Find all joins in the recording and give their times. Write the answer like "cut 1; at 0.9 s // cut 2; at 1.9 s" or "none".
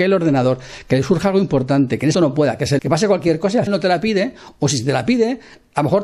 cut 1; at 2.1 s // cut 2; at 2.8 s // cut 3; at 3.7 s